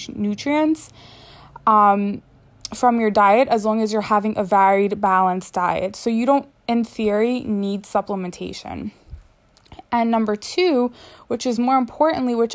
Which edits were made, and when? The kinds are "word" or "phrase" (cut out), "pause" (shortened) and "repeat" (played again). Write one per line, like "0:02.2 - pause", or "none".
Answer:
none